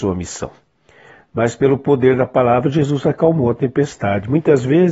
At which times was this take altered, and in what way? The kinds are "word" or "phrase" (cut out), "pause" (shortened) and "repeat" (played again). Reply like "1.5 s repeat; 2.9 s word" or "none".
none